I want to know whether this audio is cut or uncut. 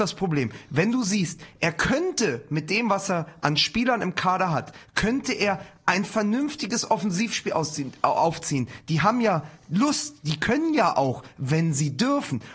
uncut